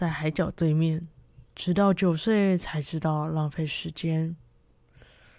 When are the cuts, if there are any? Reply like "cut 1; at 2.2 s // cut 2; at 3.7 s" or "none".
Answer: cut 1; at 1.5 s